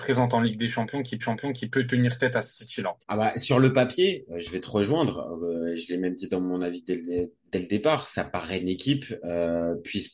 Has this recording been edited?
yes; 3 cuts; at 1.2 s, 3.0 s, 8.6 s

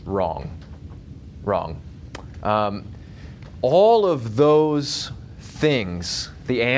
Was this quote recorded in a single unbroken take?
yes; 0 cuts

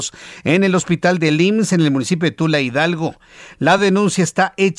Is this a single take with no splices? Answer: yes; 0 cuts

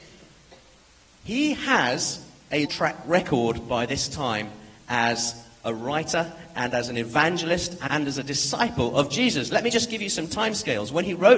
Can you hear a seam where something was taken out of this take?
yes; 2 cuts; at 2.7 s, 7.9 s

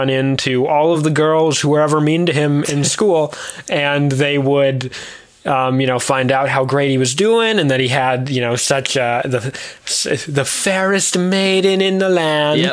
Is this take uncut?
yes; 0 cuts

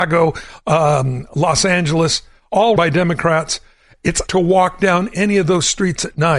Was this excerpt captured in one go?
no; 2 cuts; at 2.8 s, 4.3 s

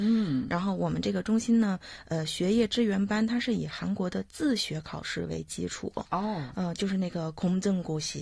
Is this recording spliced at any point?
no; 0 cuts

